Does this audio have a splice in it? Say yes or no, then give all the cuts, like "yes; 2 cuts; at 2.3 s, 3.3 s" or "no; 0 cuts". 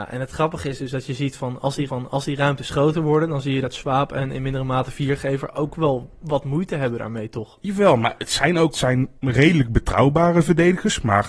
yes; 3 cuts; at 1.9 s, 8.7 s, 9.2 s